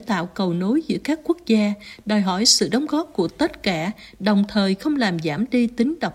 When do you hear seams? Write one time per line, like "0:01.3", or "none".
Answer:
none